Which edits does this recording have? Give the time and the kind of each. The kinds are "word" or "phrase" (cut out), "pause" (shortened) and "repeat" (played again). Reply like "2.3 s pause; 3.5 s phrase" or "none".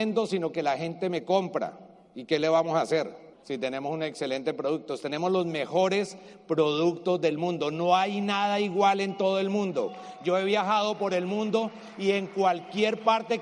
3.3 s pause